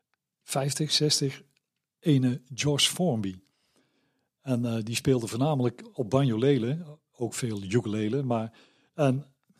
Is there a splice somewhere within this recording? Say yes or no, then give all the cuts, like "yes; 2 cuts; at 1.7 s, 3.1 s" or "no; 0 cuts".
no; 0 cuts